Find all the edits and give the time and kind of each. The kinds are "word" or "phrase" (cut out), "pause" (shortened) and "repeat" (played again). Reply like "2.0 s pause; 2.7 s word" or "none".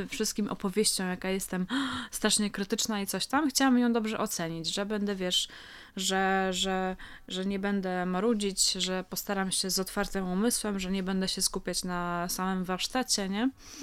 none